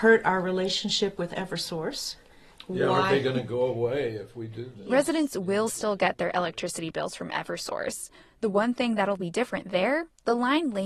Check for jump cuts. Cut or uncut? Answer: uncut